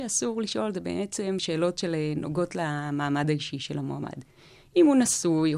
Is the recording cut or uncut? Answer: uncut